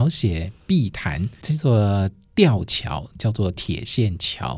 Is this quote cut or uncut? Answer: cut